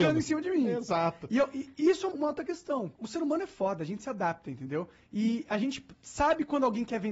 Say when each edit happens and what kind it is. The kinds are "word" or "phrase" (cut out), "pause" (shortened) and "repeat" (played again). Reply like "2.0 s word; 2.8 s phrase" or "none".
2.1 s word; 2.9 s pause